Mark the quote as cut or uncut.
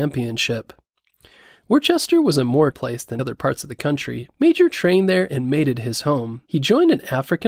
cut